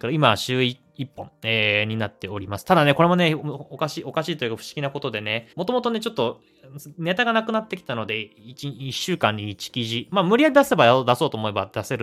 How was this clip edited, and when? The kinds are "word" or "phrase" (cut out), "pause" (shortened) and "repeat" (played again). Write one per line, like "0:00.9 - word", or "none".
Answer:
0:05.5 - pause